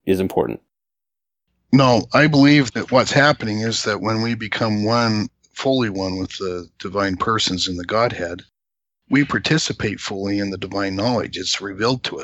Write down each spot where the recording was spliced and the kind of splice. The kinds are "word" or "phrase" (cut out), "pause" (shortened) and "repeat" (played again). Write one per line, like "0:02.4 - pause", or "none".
0:02.7 - word